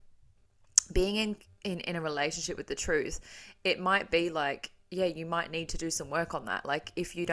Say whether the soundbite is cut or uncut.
uncut